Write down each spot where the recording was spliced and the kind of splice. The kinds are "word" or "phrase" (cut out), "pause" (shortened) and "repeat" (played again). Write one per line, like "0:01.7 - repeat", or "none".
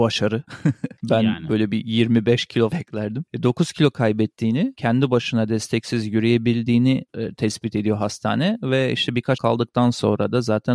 0:02.7 - word
0:04.7 - word
0:09.4 - word